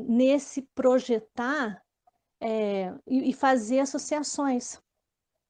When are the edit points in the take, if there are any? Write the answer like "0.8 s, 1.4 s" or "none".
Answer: none